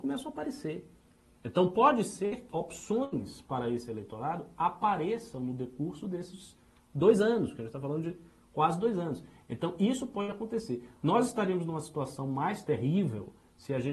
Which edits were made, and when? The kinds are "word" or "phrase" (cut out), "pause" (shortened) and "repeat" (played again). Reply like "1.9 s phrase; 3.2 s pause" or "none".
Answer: 2.5 s word